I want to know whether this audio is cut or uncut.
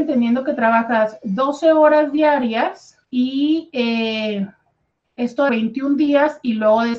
cut